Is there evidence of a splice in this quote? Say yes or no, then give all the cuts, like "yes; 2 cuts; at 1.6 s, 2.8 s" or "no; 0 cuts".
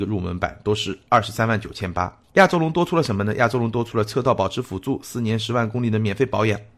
yes; 1 cut; at 2.2 s